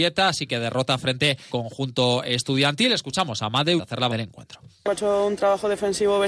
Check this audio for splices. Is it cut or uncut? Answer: cut